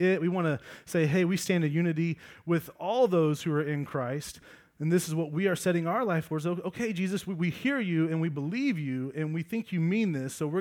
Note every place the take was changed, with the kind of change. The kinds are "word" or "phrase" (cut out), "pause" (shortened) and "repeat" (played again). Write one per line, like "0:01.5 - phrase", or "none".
none